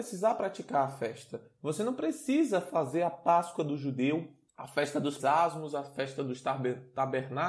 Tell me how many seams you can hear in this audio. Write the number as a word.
one